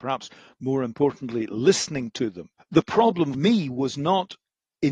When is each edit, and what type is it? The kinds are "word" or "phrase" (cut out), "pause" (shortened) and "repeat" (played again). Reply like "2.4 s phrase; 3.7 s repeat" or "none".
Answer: 3.3 s word